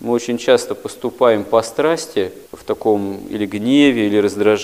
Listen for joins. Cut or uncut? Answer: cut